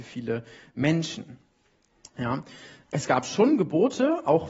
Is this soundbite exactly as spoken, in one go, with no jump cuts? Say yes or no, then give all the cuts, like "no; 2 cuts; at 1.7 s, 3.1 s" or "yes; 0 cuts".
no; 1 cut; at 2.8 s